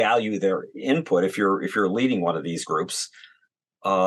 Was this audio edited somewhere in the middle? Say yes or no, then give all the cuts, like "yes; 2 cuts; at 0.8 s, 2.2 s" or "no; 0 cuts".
no; 0 cuts